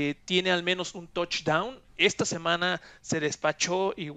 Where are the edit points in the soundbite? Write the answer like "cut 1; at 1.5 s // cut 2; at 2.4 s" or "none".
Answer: cut 1; at 1.9 s